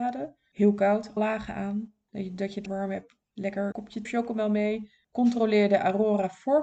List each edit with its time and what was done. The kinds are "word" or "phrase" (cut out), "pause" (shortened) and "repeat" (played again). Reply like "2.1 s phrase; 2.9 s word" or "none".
1.2 s word; 2.7 s word; 3.7 s word; 4.0 s phrase